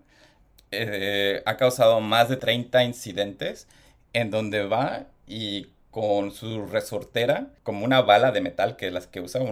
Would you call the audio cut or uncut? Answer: uncut